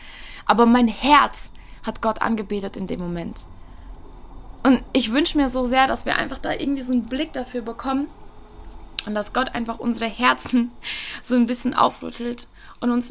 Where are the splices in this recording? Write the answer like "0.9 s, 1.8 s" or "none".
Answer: none